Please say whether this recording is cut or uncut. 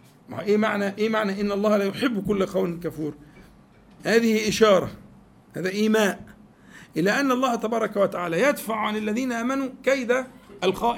uncut